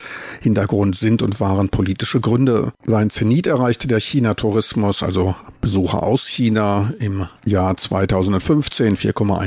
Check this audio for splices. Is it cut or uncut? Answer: cut